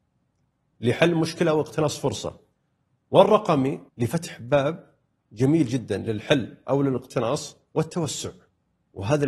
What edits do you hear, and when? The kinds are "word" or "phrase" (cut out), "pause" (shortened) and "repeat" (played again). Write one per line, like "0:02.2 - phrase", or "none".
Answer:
0:03.9 - pause